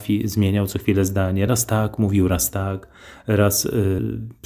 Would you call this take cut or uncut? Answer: uncut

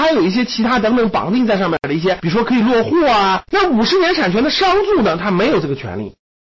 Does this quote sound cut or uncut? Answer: cut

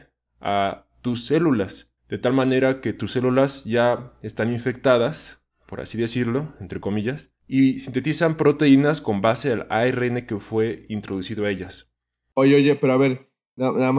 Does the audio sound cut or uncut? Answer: uncut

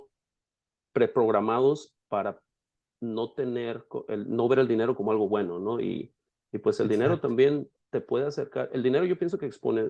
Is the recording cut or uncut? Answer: cut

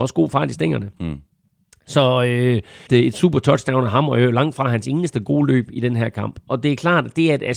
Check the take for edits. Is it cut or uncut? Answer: cut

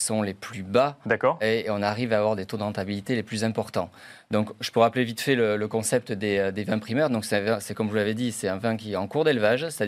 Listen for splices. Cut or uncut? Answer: uncut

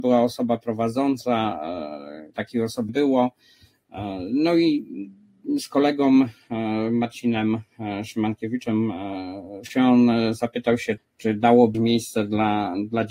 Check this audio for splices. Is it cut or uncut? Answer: cut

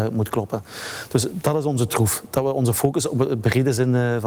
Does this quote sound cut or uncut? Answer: uncut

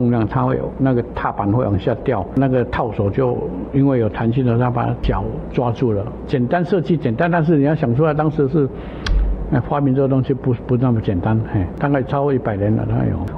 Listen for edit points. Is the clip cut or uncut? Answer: uncut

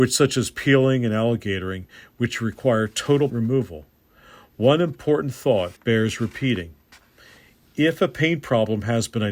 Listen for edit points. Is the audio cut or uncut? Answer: cut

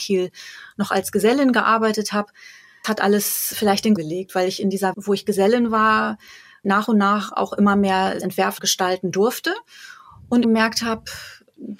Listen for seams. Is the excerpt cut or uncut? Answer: cut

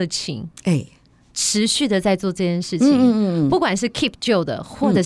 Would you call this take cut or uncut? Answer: uncut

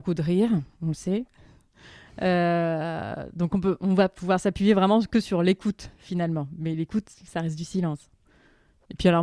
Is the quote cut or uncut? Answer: uncut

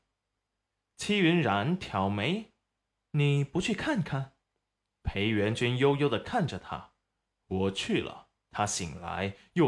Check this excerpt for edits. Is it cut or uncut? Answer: cut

